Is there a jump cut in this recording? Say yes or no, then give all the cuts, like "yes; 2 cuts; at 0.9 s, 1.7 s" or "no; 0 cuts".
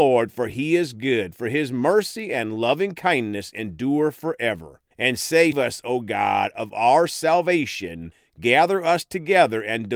yes; 2 cuts; at 4.9 s, 5.5 s